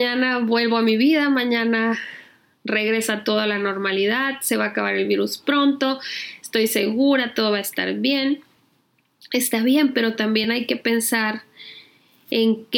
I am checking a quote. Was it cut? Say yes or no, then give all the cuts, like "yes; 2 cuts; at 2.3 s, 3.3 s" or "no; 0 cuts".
no; 0 cuts